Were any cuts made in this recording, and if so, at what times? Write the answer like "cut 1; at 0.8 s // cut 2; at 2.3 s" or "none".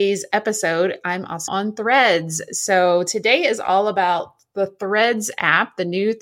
cut 1; at 1.5 s